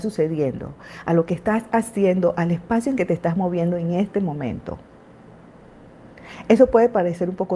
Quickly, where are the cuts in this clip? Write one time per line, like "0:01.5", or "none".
none